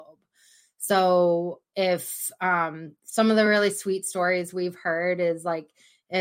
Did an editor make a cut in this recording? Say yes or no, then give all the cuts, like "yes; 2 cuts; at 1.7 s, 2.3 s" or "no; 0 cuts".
no; 0 cuts